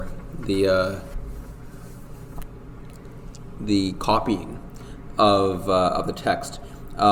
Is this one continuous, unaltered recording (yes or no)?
yes